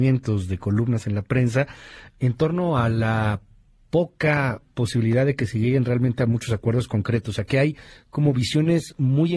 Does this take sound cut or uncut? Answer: uncut